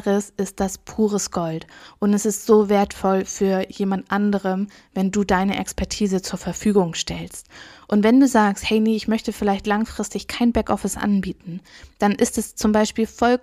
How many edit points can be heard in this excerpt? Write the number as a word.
zero